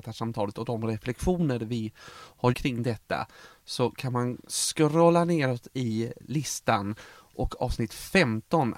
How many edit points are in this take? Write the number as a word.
one